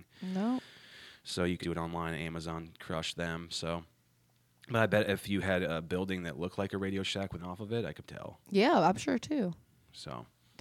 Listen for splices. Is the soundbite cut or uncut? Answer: cut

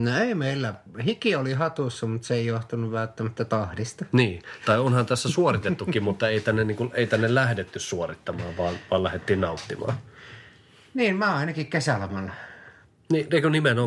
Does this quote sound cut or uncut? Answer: uncut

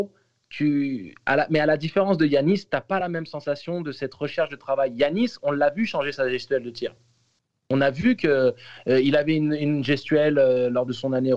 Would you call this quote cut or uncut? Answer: uncut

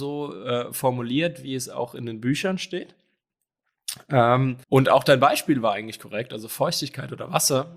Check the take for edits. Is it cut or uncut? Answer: cut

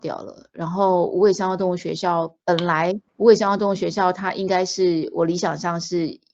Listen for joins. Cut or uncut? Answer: cut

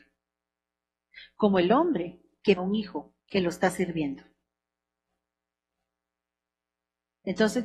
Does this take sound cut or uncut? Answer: cut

